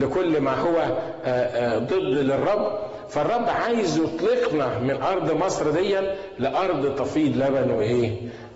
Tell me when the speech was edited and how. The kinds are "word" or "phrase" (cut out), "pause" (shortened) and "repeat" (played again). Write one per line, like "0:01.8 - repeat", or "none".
none

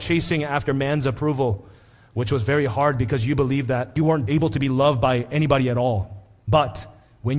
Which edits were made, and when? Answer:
none

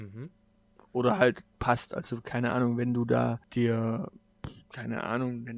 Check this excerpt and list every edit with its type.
none

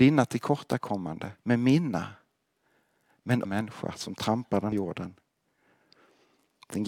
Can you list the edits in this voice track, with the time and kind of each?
0:01.4 - pause
0:03.4 - phrase
0:04.7 - word

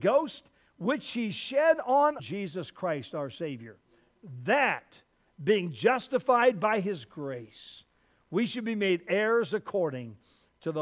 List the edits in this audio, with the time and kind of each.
0:02.2 - phrase

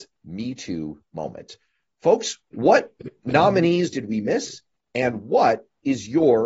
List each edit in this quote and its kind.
none

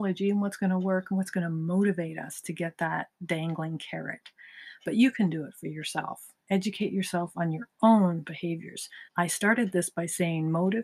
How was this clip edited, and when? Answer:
0:09.1 - pause

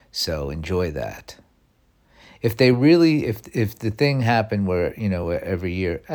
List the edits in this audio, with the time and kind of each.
none

